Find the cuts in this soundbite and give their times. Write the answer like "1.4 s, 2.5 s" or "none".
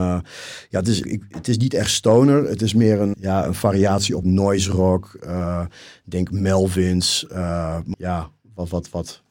1.0 s, 3.1 s, 4.2 s, 7.9 s